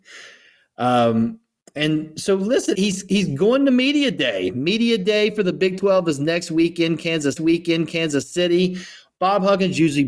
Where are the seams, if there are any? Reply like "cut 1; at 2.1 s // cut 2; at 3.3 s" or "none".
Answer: cut 1; at 2.7 s // cut 2; at 7.4 s